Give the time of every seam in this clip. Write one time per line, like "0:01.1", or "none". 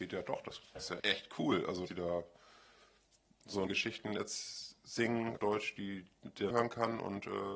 0:01.0
0:01.9
0:03.7
0:05.4
0:06.5